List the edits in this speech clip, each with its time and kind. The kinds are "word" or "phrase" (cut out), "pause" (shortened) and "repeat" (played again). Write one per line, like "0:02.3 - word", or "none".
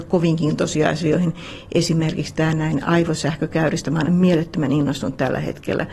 0:04.1 - word